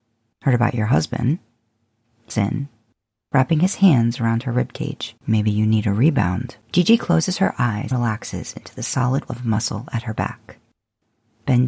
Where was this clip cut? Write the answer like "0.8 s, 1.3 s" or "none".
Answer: 2.3 s, 5.2 s, 6.6 s, 7.9 s, 9.3 s